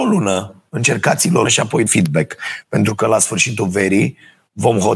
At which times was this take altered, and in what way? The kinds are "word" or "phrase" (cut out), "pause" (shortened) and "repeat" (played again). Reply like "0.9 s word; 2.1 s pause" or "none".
1.5 s word; 1.9 s word